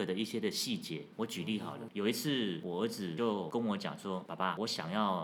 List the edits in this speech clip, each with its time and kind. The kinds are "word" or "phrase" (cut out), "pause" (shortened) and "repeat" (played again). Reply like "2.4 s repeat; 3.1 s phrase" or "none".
1.1 s pause